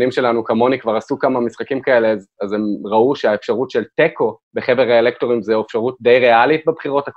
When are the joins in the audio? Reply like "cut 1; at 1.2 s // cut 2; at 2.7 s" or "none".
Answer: cut 1; at 4.4 s